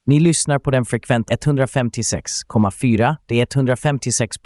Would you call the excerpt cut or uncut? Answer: cut